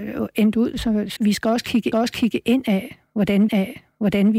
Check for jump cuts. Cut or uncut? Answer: cut